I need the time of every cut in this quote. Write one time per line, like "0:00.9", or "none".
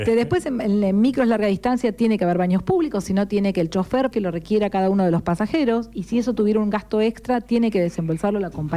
0:04.1